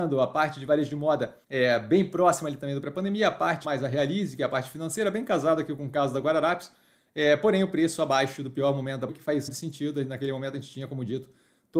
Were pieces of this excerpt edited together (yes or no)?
yes